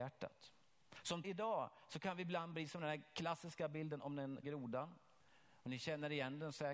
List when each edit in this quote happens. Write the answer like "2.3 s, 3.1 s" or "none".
1.2 s, 4.4 s